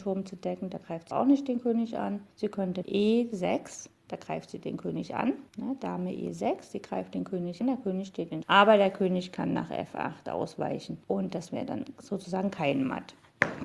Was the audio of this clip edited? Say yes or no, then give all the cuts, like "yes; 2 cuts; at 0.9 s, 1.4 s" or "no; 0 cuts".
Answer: yes; 7 cuts; at 1.1 s, 2.3 s, 2.8 s, 5.5 s, 7.6 s, 8.4 s, 11.0 s